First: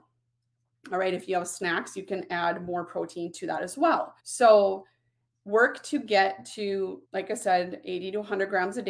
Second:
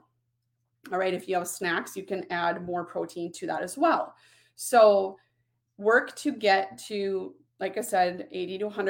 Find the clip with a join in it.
first; 2 cuts; at 4.2 s, 7.0 s

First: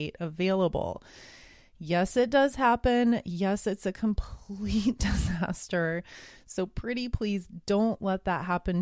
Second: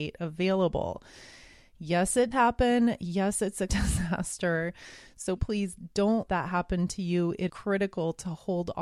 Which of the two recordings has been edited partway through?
second; 5 cuts; at 2.3 s, 3.7 s, 5.4 s, 6.3 s, 7.5 s

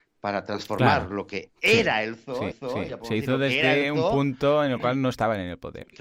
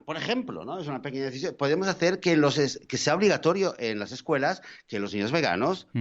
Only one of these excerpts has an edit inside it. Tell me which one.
first; 1 cut; at 2.5 s

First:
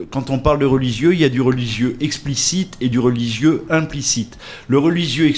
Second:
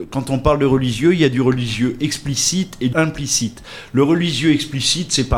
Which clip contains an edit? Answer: second; 1 cut; at 2.9 s

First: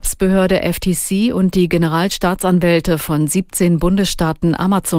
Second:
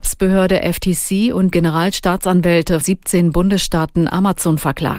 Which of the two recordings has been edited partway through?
second; 2 cuts; at 1.5 s, 2.8 s

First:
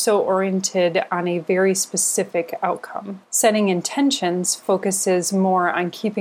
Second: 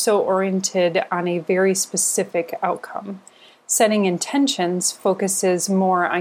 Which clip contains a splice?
first; 1 cut; at 3.2 s

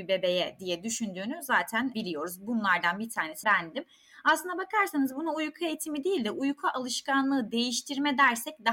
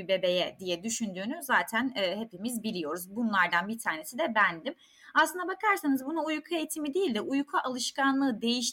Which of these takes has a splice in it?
first; 2 cuts; at 1.9 s, 3.4 s

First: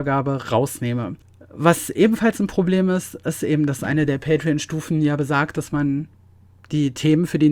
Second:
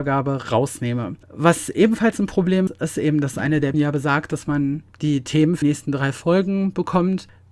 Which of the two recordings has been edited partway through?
second; 5 cuts; at 1.2 s, 2.7 s, 3.7 s, 4.9 s, 5.6 s

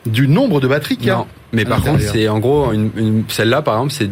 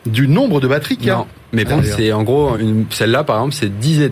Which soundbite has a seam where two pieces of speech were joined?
second; 2 cuts; at 1.7 s, 2.5 s

